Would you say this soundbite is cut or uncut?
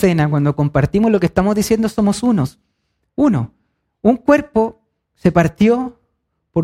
uncut